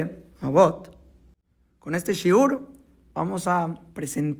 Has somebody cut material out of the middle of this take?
no; 0 cuts

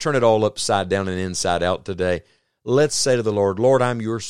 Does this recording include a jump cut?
no; 0 cuts

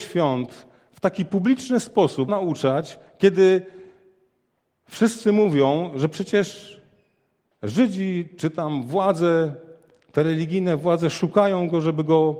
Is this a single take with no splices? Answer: no; 1 cut; at 2.3 s

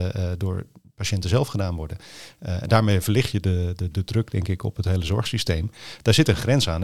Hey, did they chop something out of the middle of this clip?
no; 0 cuts

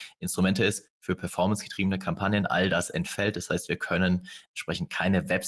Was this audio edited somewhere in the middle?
no; 0 cuts

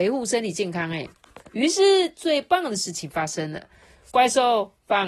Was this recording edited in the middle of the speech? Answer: no; 0 cuts

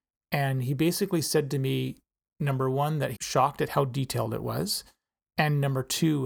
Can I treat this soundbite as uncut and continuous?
no; 1 cut; at 3.2 s

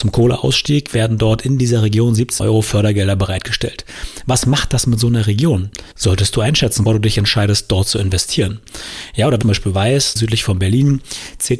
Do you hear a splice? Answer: yes; 5 cuts; at 2.4 s, 5.9 s, 6.9 s, 9.4 s, 10.2 s

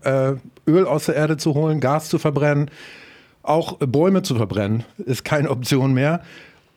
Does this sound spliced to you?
no; 0 cuts

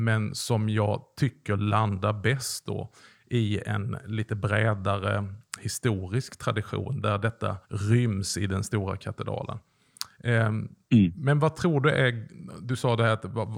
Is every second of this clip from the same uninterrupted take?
no; 1 cut; at 7.6 s

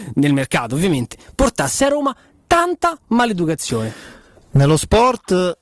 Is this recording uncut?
yes; 0 cuts

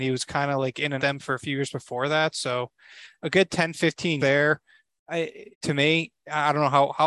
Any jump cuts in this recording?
yes; 3 cuts; at 1.0 s, 4.2 s, 5.5 s

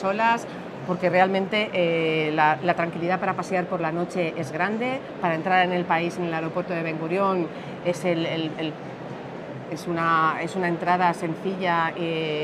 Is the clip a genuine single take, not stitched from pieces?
yes; 0 cuts

